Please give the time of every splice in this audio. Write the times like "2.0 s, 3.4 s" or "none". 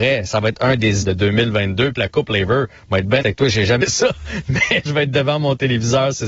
1.0 s, 2.0 s, 3.2 s, 3.8 s, 4.9 s

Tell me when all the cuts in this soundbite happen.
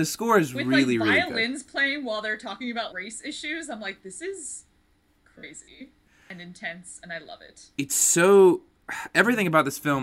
2.9 s

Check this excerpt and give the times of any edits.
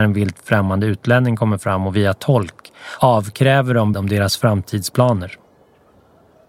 3.9 s

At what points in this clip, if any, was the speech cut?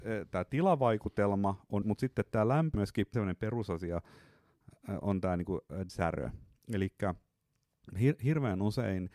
1.8 s, 2.7 s, 3.1 s, 5.0 s, 5.9 s

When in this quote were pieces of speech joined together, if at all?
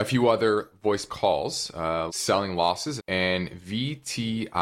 1.1 s, 2.1 s, 3.0 s

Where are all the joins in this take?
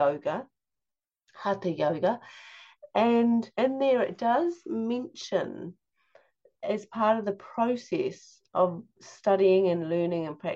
3.5 s, 6.6 s

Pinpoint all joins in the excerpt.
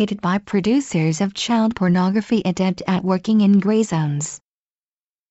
none

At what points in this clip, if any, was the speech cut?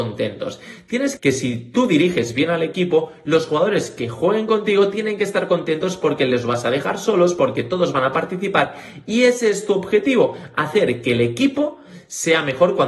1.2 s

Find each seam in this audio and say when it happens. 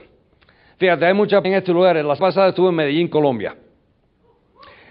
1.4 s, 2.2 s

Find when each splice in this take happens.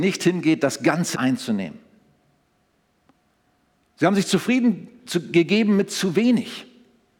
1.1 s

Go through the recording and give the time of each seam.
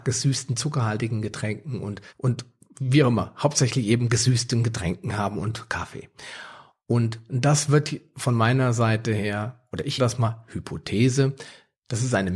2.1 s, 10.0 s

